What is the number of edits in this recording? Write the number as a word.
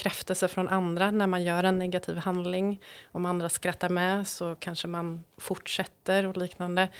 zero